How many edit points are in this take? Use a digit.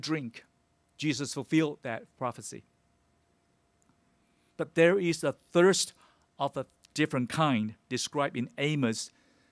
0